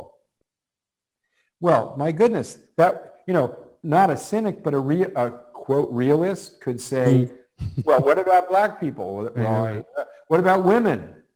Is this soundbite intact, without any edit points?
yes; 0 cuts

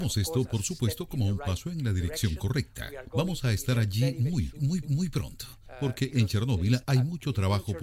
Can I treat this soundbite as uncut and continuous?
no; 1 cut; at 4.8 s

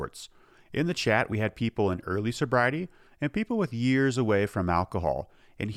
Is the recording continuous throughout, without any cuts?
yes; 0 cuts

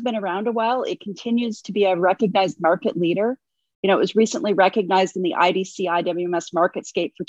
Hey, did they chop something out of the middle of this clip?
no; 0 cuts

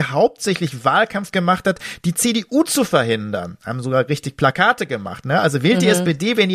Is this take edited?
yes; 1 cut; at 1.3 s

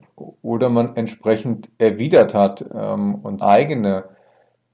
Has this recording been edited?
yes; 1 cut; at 3.4 s

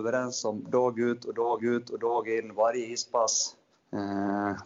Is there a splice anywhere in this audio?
yes; 2 cuts; at 1.6 s, 3.7 s

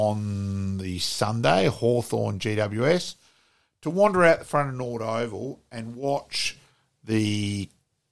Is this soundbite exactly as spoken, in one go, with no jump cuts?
yes; 0 cuts

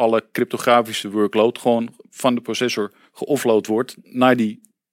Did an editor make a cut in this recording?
no; 0 cuts

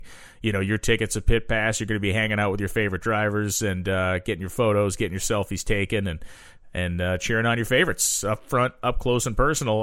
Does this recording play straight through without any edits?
yes; 0 cuts

